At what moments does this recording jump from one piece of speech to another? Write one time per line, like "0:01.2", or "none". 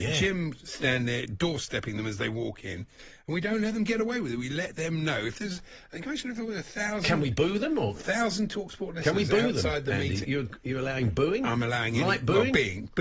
0:10.2